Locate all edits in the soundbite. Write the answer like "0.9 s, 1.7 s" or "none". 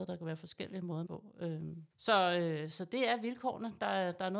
1.1 s, 1.9 s